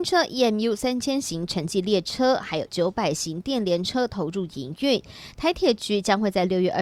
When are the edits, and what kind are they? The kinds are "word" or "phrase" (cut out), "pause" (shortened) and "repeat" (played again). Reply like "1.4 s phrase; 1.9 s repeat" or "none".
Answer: 2.7 s word